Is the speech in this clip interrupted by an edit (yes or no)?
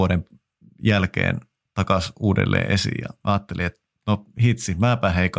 no